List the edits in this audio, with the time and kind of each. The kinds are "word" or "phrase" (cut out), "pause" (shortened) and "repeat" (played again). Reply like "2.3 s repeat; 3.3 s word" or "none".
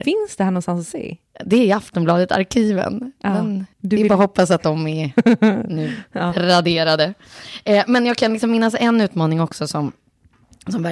3.7 s pause